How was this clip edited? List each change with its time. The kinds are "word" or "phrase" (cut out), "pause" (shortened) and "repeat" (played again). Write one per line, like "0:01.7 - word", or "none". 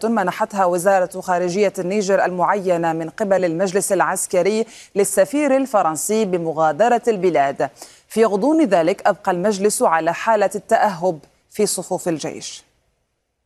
none